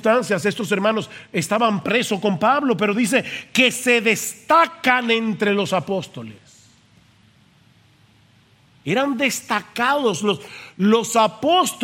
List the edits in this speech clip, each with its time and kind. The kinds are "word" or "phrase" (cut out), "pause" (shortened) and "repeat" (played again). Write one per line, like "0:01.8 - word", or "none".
none